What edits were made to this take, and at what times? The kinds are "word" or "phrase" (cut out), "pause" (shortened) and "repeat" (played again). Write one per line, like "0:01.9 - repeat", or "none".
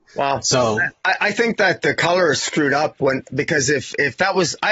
none